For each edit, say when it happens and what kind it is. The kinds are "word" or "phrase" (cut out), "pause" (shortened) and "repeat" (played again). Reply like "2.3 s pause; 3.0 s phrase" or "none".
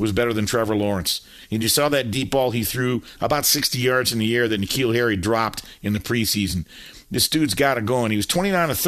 none